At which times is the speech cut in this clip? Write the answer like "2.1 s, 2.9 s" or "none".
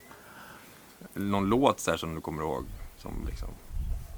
3.2 s